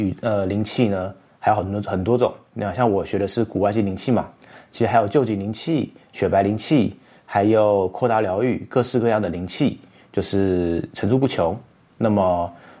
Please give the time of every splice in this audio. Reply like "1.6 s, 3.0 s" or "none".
none